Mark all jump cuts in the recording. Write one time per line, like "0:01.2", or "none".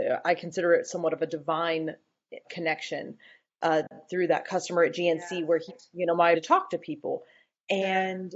0:02.4
0:05.7
0:06.3